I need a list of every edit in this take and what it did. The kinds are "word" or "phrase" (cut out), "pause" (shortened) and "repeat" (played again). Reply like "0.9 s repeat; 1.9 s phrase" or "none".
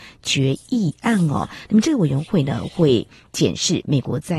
none

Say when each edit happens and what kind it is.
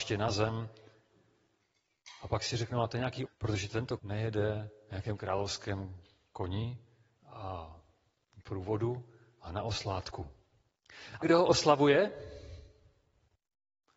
3.3 s word; 4.0 s word; 11.2 s word

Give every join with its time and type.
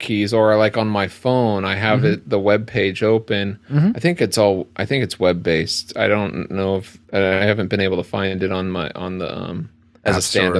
7.0 s pause

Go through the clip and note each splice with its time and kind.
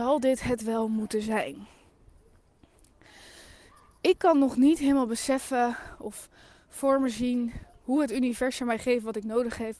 none

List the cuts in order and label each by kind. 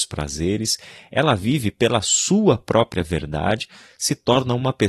none

